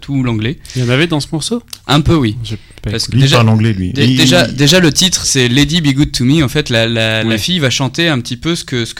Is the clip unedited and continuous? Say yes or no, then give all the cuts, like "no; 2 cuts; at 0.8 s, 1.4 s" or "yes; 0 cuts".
no; 2 cuts; at 3.1 s, 5.2 s